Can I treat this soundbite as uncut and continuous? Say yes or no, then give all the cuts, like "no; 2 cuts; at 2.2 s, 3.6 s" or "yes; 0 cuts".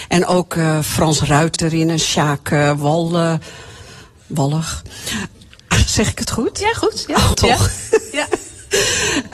no; 2 cuts; at 1.6 s, 7.3 s